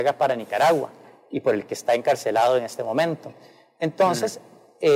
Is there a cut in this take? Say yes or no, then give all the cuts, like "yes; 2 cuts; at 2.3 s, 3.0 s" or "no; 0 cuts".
no; 0 cuts